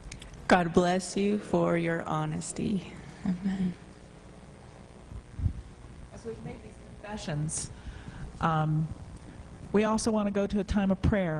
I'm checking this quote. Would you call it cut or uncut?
uncut